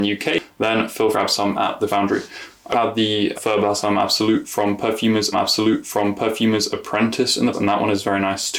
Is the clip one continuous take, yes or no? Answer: no